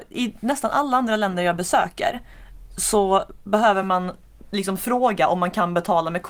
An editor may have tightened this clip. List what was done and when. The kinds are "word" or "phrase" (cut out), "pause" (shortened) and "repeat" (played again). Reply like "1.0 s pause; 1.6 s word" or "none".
none